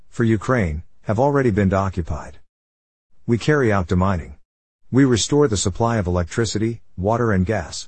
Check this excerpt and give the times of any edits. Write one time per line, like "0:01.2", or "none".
none